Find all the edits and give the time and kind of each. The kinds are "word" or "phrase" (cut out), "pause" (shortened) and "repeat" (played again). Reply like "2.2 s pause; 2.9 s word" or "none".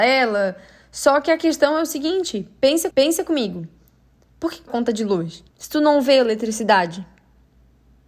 2.9 s repeat; 4.7 s phrase; 5.5 s pause